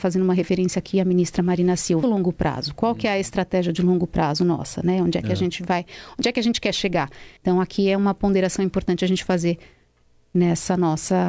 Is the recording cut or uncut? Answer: cut